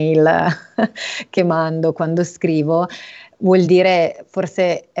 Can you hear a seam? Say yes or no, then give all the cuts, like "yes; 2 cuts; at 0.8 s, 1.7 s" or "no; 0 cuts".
no; 0 cuts